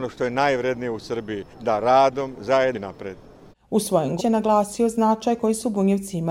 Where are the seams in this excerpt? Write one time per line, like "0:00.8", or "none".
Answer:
0:01.5
0:02.7
0:03.5
0:04.2